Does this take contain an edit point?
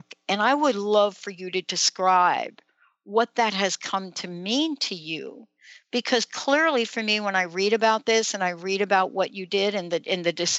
no; 0 cuts

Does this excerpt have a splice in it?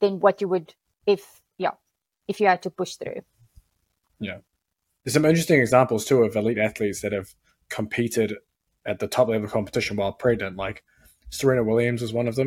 no; 0 cuts

